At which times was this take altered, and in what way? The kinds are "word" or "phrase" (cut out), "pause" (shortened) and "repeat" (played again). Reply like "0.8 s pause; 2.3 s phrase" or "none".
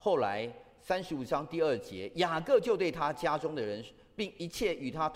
none